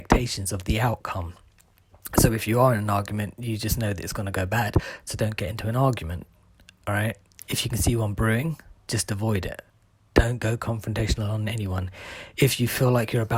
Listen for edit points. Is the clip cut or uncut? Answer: uncut